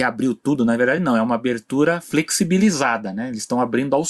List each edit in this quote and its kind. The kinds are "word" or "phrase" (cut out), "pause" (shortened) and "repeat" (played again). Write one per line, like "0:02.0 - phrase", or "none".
none